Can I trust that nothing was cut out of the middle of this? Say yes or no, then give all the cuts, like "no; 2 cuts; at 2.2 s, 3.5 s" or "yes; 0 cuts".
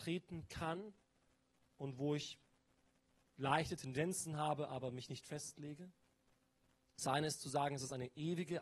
yes; 0 cuts